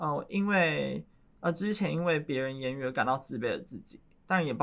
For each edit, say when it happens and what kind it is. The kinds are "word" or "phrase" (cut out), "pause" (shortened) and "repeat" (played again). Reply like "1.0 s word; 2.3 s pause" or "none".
none

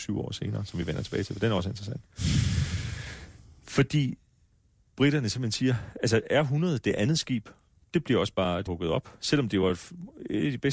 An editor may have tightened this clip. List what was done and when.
8.7 s word

